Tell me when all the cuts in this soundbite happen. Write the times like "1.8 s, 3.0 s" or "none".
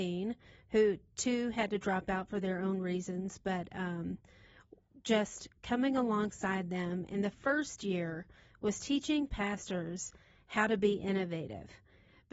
7.3 s